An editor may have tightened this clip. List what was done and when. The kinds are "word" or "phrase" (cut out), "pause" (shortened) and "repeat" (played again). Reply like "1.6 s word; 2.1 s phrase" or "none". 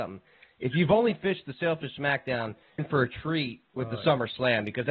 2.8 s word